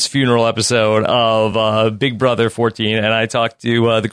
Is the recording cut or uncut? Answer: uncut